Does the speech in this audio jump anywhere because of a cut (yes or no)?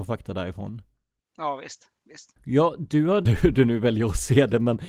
yes